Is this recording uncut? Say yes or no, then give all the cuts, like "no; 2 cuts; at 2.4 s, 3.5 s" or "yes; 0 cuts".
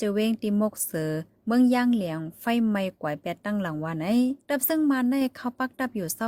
yes; 0 cuts